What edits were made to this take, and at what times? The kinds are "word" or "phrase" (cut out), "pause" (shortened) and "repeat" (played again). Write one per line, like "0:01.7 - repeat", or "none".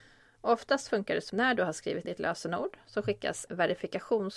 0:01.3 - word
0:02.0 - word
0:03.5 - word